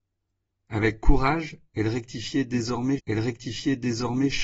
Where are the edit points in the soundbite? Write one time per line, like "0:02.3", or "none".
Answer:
0:03.0